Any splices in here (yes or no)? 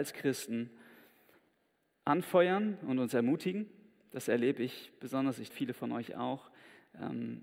yes